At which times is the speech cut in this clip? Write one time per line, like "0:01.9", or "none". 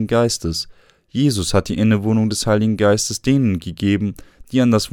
none